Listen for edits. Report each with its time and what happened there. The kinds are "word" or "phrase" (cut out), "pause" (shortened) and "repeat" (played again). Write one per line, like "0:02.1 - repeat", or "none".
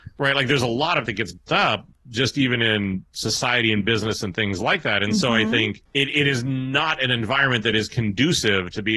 0:01.1 - word
0:05.9 - pause